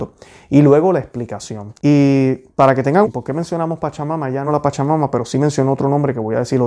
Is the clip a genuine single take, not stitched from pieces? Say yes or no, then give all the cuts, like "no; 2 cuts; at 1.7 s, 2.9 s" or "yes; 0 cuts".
no; 3 cuts; at 1.8 s, 3.0 s, 4.5 s